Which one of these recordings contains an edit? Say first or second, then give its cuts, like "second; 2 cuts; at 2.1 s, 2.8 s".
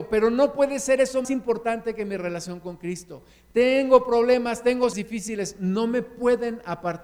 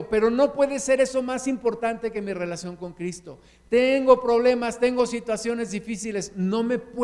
first; 2 cuts; at 1.2 s, 4.9 s